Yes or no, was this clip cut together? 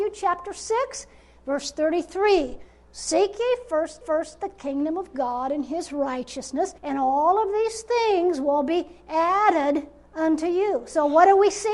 yes